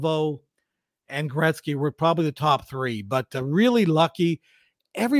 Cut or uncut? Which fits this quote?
uncut